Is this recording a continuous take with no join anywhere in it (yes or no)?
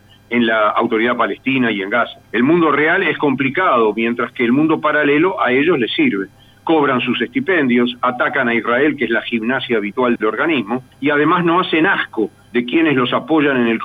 no